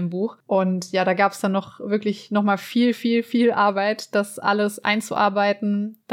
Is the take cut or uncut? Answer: uncut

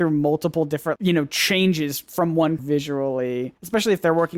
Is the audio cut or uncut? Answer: cut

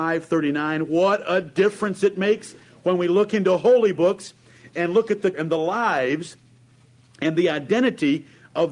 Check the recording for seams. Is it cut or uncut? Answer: cut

